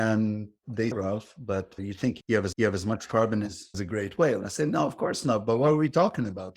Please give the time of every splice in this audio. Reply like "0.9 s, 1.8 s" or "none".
0.9 s, 2.5 s, 3.7 s